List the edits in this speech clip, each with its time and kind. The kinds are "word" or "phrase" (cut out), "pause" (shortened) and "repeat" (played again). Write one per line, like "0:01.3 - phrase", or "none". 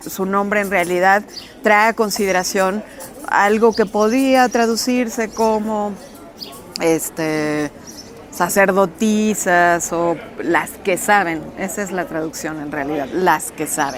none